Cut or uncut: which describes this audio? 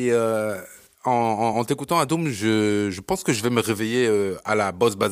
uncut